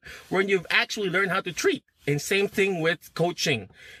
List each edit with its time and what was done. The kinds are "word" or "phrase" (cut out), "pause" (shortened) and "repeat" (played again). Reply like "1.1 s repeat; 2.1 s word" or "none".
none